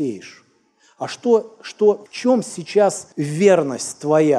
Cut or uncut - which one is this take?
cut